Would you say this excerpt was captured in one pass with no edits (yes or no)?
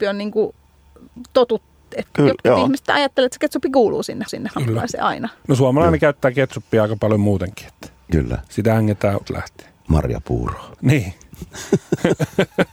no